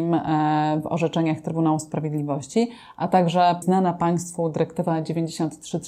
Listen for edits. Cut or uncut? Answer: cut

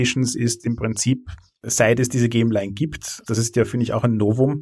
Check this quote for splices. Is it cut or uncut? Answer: cut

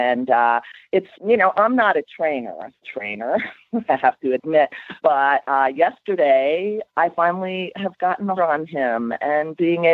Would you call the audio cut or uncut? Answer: cut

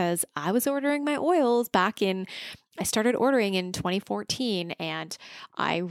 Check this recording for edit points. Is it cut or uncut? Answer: uncut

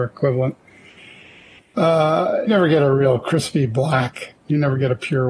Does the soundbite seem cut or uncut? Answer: cut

